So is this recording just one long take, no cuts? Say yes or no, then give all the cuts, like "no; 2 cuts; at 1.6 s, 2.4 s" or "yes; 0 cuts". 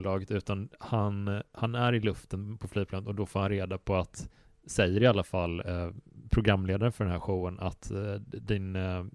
yes; 0 cuts